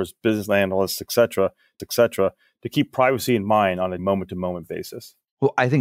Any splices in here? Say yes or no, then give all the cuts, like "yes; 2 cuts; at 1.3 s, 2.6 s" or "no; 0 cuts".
yes; 2 cuts; at 1.8 s, 4.0 s